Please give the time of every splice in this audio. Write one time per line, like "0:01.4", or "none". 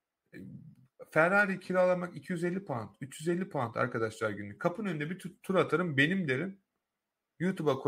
none

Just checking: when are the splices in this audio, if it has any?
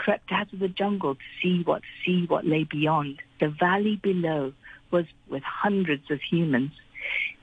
0:01.8
0:03.3
0:05.3

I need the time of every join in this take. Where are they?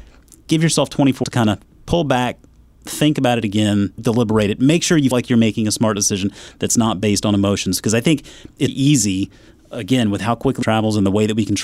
0:01.2
0:04.0
0:05.1
0:08.7
0:10.6

